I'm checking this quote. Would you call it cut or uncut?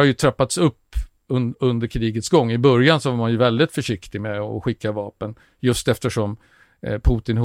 uncut